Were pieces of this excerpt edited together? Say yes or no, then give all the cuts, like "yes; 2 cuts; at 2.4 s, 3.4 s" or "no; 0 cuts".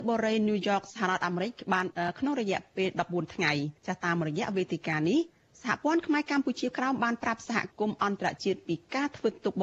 yes; 1 cut; at 3.8 s